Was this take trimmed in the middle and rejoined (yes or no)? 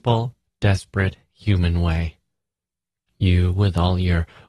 no